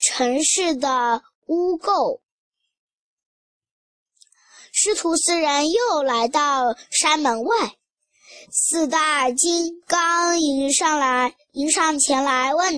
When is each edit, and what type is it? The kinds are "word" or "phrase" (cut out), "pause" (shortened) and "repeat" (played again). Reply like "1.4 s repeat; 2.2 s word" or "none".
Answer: 8.4 s pause